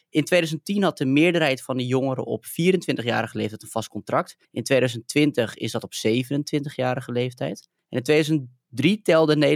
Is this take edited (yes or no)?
yes